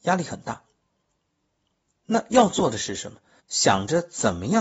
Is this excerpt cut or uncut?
cut